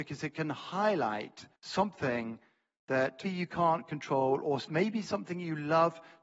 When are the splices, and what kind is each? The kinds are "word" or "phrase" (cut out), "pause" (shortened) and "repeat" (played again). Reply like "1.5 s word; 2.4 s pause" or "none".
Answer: 1.6 s pause; 3.2 s word